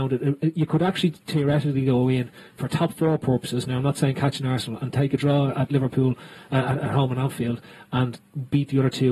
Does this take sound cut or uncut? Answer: uncut